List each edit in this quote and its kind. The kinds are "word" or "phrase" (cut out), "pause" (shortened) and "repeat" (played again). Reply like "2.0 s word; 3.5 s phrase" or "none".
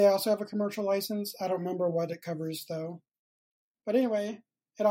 none